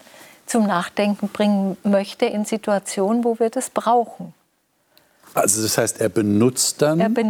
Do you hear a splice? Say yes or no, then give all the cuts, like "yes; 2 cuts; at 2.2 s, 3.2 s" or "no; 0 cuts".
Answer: no; 0 cuts